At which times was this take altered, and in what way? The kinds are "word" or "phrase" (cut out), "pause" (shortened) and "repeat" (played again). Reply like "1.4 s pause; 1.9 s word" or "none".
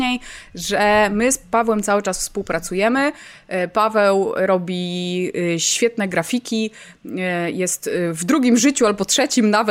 none